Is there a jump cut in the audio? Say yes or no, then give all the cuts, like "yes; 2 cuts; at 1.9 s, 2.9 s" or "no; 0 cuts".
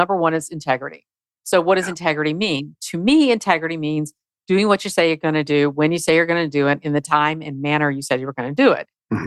no; 0 cuts